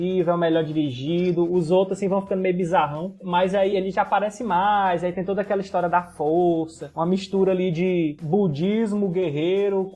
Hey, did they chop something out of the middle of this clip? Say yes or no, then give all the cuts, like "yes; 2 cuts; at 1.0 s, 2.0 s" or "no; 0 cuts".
yes; 1 cut; at 3.7 s